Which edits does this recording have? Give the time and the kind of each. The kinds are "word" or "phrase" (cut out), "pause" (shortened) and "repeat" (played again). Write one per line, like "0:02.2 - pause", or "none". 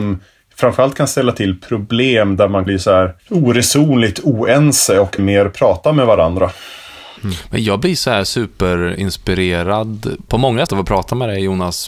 0:02.7 - word
0:03.2 - pause
0:05.2 - word
0:07.2 - pause
0:10.3 - word
0:10.7 - word